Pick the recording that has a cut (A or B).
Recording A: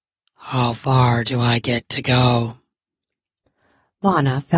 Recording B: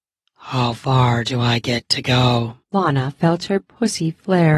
B